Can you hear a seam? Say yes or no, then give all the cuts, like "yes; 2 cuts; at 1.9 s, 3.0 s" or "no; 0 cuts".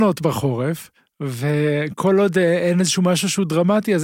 no; 0 cuts